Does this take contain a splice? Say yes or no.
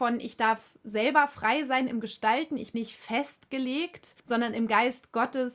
yes